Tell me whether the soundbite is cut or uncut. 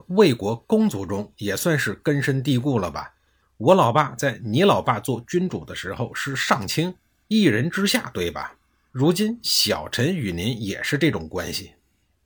uncut